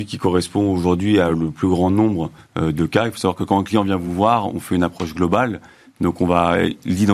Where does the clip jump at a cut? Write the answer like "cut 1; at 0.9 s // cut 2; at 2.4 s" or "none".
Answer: none